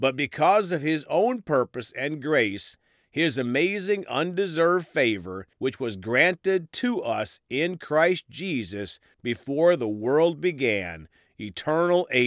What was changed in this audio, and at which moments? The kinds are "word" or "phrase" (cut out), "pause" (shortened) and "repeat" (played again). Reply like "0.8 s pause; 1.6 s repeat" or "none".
5.5 s pause